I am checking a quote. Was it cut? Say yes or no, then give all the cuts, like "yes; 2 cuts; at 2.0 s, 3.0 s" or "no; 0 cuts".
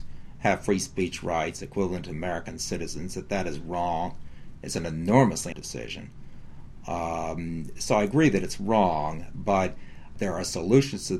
yes; 1 cut; at 5.5 s